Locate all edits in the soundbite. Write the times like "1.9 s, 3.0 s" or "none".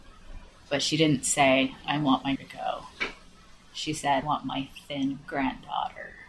2.4 s, 4.2 s